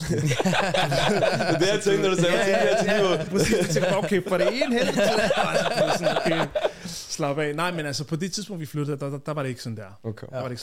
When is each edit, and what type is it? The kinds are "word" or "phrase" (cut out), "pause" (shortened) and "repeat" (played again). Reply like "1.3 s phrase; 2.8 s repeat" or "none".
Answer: 3.3 s phrase

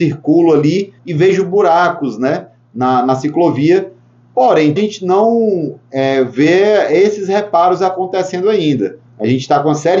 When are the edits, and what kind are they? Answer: 1.0 s pause; 4.8 s phrase; 9.1 s pause

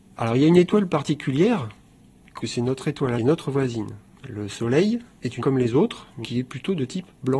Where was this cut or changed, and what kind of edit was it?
2.4 s phrase; 3.2 s phrase; 4.1 s pause; 5.4 s word; 6.2 s word

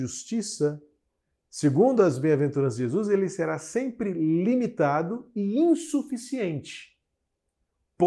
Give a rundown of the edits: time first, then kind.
none

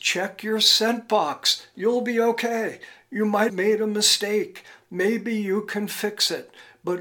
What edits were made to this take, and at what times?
3.5 s word

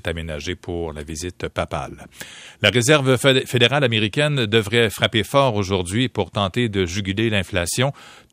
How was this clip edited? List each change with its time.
none

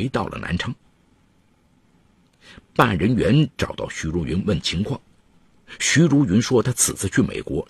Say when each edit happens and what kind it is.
none

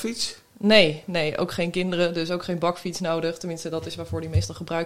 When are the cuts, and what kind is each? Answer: none

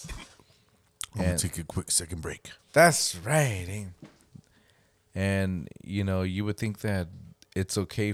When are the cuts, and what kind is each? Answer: 2.6 s pause

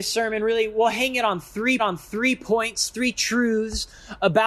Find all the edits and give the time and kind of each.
1.8 s repeat

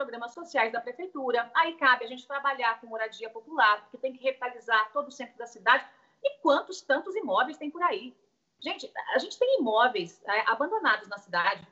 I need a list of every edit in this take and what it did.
none

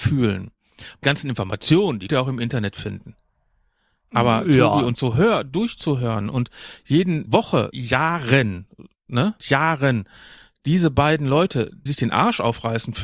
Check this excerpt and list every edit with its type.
1.0 s word; 2.1 s word; 4.9 s word; 7.3 s word; 7.7 s word; 9.4 s word; 11.9 s word

